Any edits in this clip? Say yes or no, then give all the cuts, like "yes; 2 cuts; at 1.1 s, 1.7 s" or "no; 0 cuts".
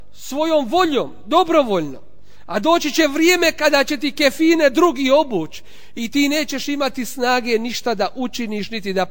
no; 0 cuts